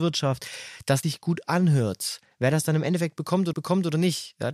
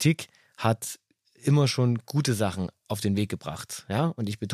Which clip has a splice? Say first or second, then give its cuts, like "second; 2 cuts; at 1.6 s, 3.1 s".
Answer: first; 2 cuts; at 1.0 s, 3.5 s